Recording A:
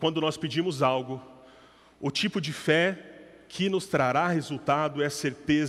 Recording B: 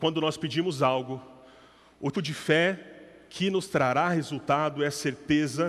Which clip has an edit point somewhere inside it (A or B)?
B